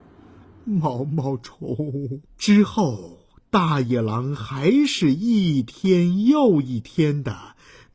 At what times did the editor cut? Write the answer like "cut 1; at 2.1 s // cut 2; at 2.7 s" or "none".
cut 1; at 2.3 s